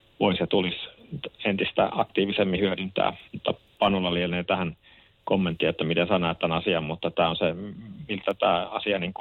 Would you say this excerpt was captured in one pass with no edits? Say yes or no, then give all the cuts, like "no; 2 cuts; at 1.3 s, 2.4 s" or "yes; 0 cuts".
no; 1 cut; at 3.3 s